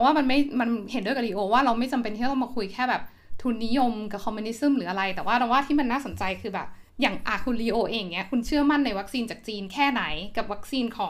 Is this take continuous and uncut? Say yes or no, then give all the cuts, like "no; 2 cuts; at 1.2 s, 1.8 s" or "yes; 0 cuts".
no; 1 cut; at 6.9 s